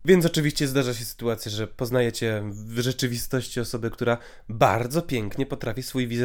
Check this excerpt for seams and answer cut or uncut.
uncut